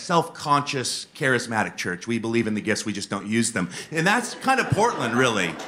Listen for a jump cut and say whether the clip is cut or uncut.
uncut